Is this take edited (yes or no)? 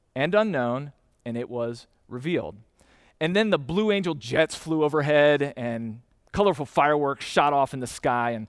no